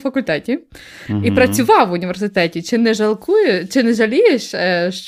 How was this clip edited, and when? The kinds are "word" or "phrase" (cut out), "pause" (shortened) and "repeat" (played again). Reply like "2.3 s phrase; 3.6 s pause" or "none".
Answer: none